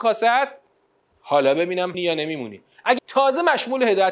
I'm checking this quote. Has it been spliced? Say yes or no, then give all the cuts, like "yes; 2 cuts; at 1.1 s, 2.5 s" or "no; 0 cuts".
yes; 2 cuts; at 1.9 s, 3.0 s